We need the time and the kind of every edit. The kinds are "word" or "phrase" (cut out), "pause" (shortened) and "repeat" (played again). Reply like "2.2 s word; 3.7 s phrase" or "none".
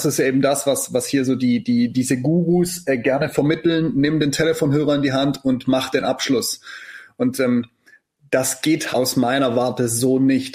8.9 s word